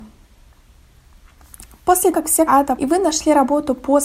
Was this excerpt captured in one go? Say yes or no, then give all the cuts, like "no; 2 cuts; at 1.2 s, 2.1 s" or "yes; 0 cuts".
no; 3 cuts; at 2.1 s, 2.5 s, 2.8 s